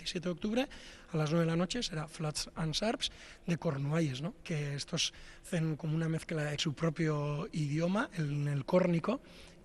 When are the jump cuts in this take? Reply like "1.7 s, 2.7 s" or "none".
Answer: 4.4 s, 6.6 s